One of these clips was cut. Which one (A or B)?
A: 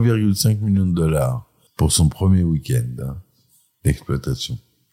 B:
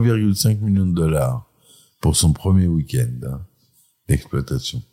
A